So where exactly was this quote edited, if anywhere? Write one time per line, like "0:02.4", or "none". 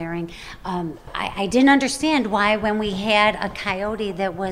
none